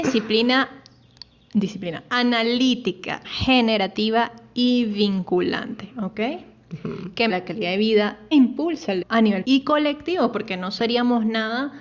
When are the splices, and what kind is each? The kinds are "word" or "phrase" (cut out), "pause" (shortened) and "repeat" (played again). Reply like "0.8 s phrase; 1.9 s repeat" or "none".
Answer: 3.2 s word; 7.3 s word; 8.3 s word; 9.0 s word; 9.4 s word